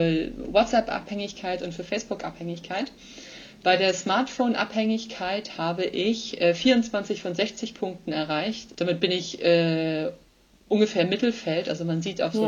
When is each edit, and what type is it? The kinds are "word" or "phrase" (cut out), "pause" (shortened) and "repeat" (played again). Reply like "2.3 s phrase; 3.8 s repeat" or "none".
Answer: none